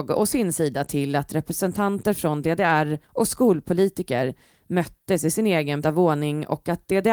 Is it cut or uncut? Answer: cut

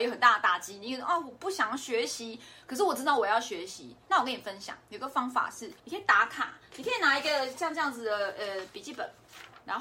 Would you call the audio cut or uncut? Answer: cut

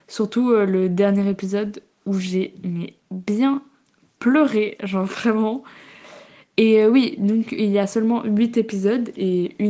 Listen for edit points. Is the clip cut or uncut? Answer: uncut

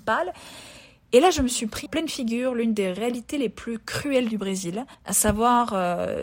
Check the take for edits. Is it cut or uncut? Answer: cut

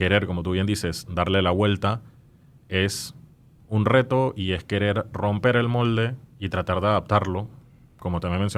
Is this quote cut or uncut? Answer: uncut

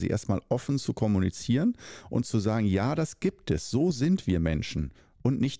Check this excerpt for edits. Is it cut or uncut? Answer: uncut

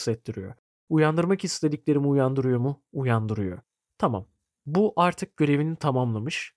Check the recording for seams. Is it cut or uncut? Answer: uncut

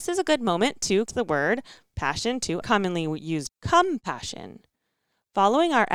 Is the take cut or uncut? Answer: cut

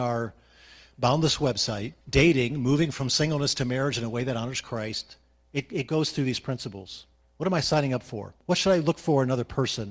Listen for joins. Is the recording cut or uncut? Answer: cut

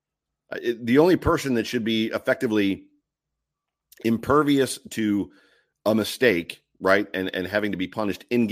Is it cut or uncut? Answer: uncut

